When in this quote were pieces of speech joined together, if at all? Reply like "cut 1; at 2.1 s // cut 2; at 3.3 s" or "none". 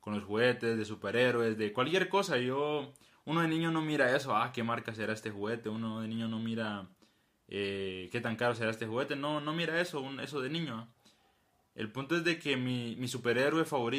none